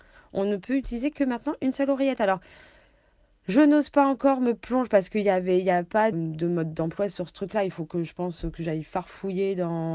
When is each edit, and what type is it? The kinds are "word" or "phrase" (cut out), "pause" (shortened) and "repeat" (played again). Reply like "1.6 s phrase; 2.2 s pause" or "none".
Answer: 6.1 s word

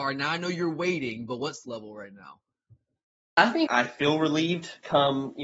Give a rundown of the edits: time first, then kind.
1.6 s word; 3.7 s word

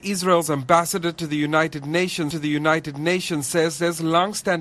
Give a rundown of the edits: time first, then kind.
2.3 s repeat

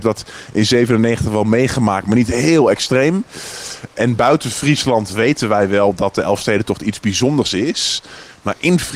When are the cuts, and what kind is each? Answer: none

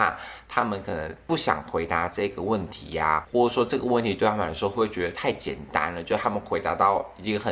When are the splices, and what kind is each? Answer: 3.2 s word

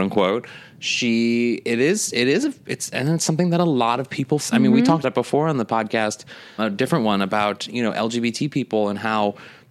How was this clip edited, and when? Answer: 4.4 s word; 5.0 s word; 6.6 s word

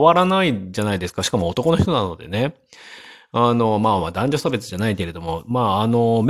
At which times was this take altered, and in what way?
none

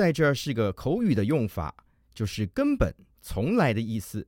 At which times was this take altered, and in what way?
none

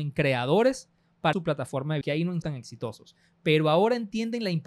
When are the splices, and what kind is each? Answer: 1.3 s word; 2.0 s word; 2.4 s word

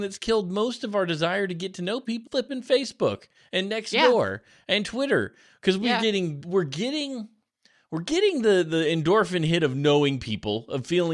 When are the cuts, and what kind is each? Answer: 2.3 s word; 6.4 s word

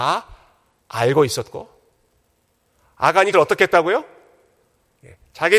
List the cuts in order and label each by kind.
3.3 s word

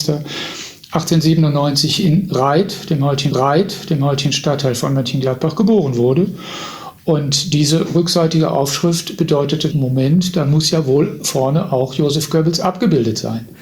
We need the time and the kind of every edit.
3.3 s repeat; 9.7 s phrase

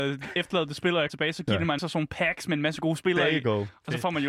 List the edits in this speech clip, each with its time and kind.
1.1 s word; 1.8 s word

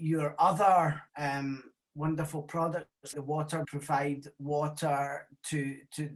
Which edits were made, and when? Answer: 1.1 s pause; 3.1 s word; 3.6 s phrase

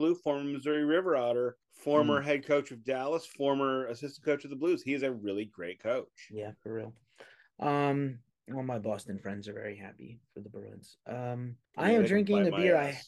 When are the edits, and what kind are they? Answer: 1.6 s pause; 11.6 s pause

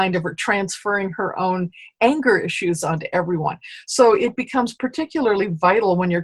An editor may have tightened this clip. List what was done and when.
none

